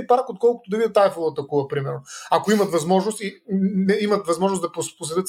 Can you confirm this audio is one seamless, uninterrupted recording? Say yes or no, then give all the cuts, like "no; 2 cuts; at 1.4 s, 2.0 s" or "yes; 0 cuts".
yes; 0 cuts